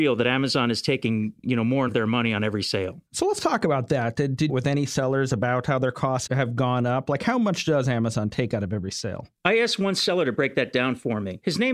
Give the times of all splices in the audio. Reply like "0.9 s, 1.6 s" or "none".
1.9 s, 3.1 s, 4.5 s, 6.3 s, 9.3 s